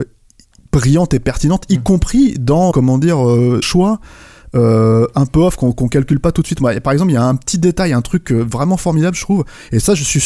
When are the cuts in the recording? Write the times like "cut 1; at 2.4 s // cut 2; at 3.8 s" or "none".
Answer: cut 1; at 2.7 s // cut 2; at 3.6 s // cut 3; at 5.7 s